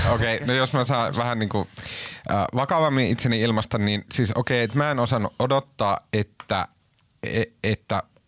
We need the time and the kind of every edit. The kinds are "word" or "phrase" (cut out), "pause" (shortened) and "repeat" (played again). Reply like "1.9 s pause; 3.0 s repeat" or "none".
none